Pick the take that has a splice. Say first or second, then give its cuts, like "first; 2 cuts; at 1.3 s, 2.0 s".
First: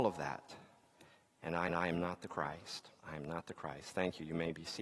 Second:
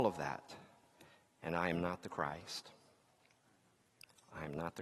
first; 2 cuts; at 1.7 s, 3.0 s